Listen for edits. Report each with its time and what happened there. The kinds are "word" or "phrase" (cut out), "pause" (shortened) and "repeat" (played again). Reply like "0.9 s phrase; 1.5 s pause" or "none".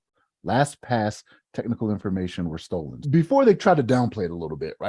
3.0 s word